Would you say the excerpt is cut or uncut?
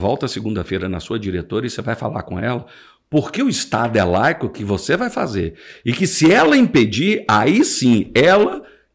uncut